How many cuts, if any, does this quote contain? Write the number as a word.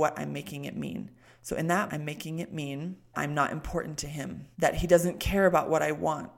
three